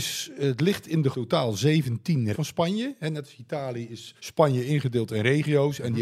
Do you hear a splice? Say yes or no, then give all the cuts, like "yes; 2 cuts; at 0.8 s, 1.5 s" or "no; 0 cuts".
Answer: yes; 3 cuts; at 1.1 s, 2.3 s, 4.2 s